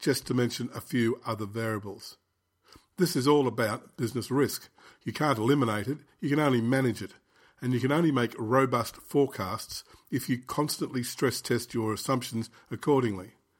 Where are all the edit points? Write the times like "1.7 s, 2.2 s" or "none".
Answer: none